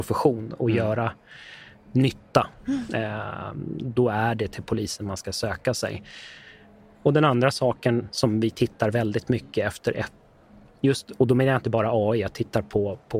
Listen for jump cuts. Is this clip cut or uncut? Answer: uncut